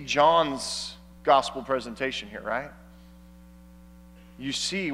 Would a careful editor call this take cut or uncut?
uncut